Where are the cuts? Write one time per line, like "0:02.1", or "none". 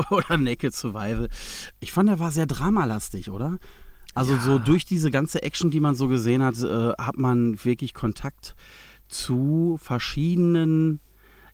0:01.7